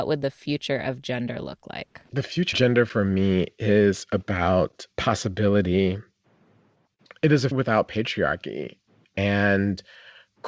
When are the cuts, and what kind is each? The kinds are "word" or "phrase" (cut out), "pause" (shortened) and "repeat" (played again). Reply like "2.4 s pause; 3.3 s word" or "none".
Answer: 2.1 s pause; 2.5 s word; 4.9 s pause; 7.5 s word